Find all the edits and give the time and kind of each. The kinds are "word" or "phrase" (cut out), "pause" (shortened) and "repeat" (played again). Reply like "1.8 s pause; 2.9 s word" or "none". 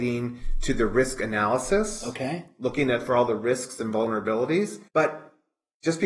4.9 s pause